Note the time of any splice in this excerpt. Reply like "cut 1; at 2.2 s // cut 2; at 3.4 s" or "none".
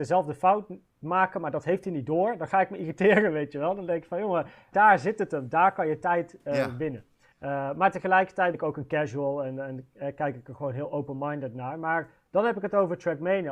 cut 1; at 4.7 s // cut 2; at 7.3 s // cut 3; at 8.5 s